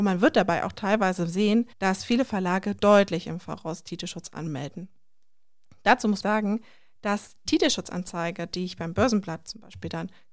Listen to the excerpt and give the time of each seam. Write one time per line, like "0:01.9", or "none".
0:01.7
0:06.2
0:07.5